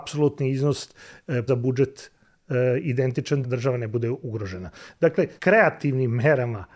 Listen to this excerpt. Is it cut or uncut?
cut